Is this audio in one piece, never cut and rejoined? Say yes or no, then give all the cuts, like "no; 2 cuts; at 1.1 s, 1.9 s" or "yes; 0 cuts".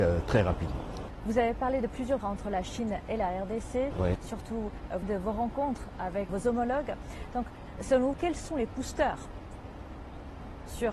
no; 4 cuts; at 2.2 s, 5.0 s, 6.3 s, 8.1 s